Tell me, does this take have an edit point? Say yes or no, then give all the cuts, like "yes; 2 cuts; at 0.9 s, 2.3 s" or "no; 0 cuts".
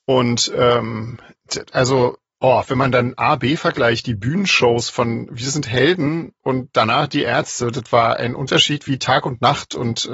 no; 0 cuts